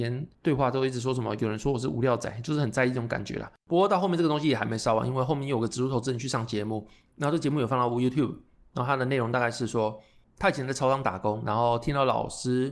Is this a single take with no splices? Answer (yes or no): yes